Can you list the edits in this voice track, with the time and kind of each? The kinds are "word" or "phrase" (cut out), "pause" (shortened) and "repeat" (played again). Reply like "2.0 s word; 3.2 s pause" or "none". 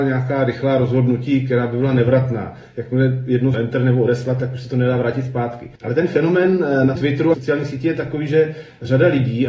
3.5 s word; 5.8 s pause; 7.0 s word; 7.3 s phrase